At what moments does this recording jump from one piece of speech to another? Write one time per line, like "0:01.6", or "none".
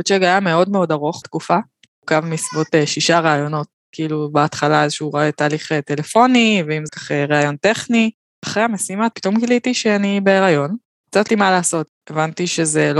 0:01.2
0:06.9
0:09.1
0:11.3